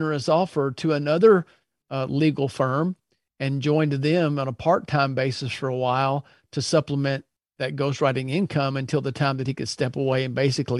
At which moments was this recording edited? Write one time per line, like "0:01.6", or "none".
none